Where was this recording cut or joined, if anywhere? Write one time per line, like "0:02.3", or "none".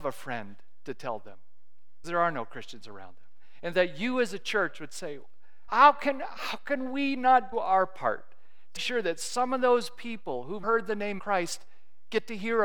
0:02.0
0:05.7
0:07.5
0:08.8
0:10.6
0:11.2